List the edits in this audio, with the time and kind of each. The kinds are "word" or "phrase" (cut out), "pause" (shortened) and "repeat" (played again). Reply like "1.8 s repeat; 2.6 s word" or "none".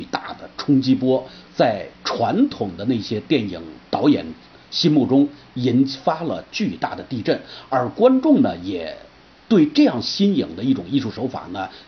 1.9 s pause